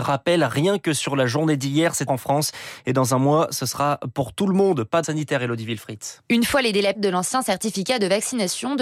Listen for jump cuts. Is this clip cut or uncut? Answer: cut